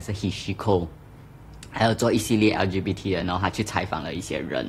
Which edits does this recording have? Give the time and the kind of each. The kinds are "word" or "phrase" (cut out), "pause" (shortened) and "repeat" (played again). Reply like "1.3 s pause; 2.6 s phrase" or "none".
none